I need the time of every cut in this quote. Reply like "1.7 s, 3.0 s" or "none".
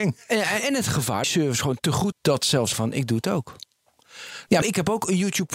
1.2 s, 2.1 s, 2.7 s, 4.6 s